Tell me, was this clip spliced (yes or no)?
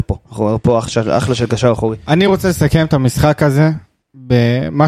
no